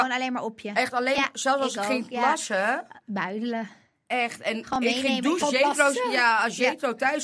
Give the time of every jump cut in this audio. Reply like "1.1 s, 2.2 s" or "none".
5.4 s